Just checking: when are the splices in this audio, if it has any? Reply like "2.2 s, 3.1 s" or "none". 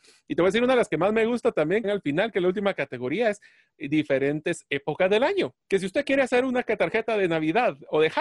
1.8 s, 3.7 s, 5.6 s